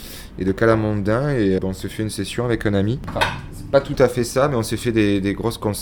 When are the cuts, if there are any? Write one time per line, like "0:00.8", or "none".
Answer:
0:01.6